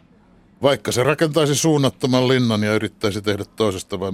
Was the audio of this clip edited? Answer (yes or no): no